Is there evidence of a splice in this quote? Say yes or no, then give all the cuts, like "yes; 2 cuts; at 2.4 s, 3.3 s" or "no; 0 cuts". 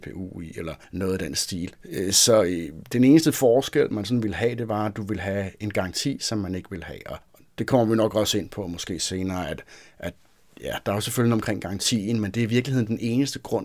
no; 0 cuts